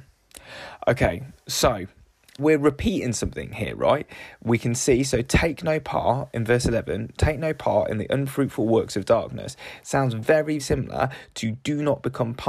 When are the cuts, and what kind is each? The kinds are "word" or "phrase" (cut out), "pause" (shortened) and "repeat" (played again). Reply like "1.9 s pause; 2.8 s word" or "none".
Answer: 2.4 s word; 10.6 s word